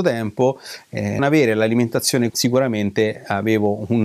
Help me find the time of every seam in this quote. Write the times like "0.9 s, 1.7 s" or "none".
1.2 s, 2.3 s

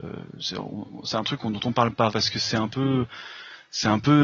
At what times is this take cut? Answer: 2.1 s

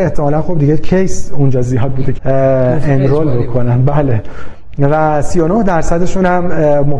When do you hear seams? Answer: 2.2 s

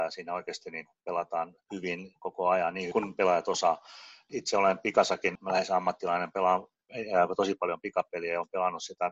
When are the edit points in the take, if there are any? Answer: 1.6 s, 2.9 s

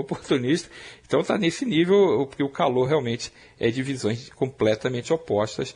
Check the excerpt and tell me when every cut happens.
none

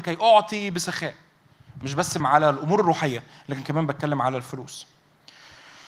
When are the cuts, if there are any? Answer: 2.2 s

